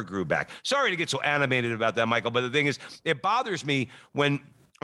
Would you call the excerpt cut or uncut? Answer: uncut